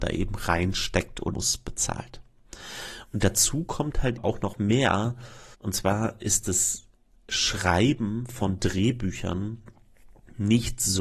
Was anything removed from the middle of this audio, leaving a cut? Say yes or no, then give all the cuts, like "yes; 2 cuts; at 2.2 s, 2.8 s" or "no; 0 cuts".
yes; 4 cuts; at 1.3 s, 4.2 s, 5.5 s, 6.9 s